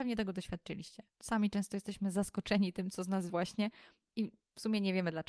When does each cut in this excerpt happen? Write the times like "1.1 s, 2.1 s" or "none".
1.1 s, 3.3 s